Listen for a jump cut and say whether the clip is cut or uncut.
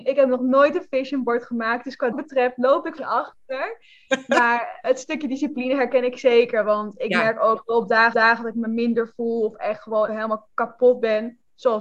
cut